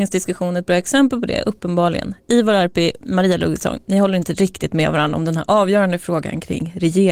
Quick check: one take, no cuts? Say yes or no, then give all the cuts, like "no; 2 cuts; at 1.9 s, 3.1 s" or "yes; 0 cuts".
yes; 0 cuts